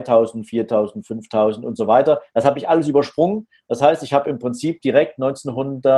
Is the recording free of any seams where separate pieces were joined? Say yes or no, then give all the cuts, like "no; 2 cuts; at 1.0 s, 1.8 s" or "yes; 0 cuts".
yes; 0 cuts